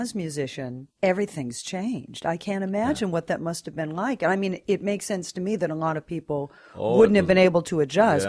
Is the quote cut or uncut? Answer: cut